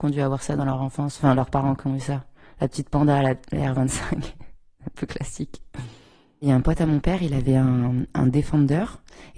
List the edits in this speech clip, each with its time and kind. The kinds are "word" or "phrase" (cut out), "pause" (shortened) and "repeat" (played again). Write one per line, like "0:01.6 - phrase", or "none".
none